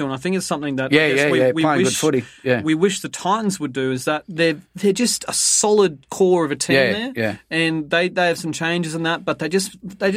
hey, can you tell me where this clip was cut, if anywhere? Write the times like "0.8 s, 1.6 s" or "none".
none